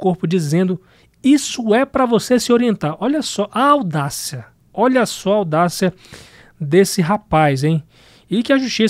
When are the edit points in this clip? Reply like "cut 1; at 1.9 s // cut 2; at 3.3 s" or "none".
none